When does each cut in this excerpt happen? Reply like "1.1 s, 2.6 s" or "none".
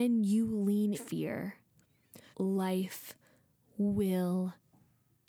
0.9 s, 2.3 s